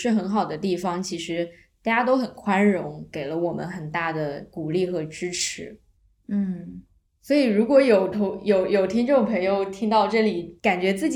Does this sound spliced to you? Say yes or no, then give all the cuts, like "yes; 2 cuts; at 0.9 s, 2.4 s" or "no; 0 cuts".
yes; 1 cut; at 7.1 s